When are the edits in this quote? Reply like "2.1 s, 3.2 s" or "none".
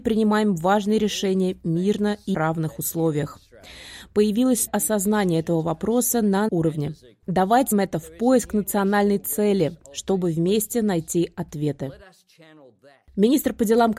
2.3 s, 4.7 s, 6.5 s, 7.7 s